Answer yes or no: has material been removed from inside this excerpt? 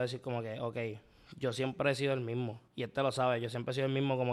yes